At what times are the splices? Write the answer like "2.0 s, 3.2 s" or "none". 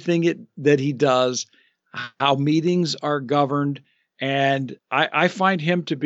4.8 s